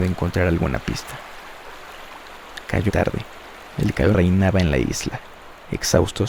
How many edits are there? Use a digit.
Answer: 2